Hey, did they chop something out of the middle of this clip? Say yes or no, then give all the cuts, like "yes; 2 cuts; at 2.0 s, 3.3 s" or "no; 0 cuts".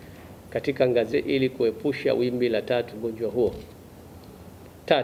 yes; 2 cuts; at 1.1 s, 2.9 s